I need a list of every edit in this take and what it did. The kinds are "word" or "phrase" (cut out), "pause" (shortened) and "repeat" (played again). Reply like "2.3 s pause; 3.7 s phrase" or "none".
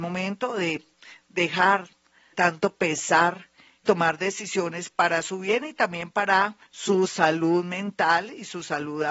2.3 s word; 3.8 s word; 6.7 s pause